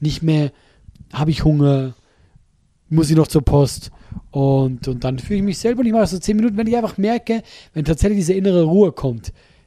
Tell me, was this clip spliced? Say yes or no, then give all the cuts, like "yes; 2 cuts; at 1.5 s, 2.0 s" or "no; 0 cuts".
no; 0 cuts